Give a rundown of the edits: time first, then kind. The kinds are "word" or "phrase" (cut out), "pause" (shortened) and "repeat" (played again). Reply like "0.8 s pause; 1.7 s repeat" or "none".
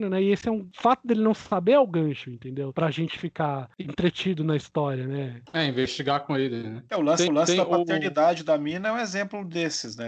7.3 s repeat